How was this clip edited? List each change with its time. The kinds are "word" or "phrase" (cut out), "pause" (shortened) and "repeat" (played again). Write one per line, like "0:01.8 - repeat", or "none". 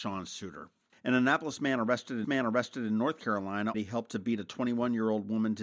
0:02.2 - repeat
0:03.7 - phrase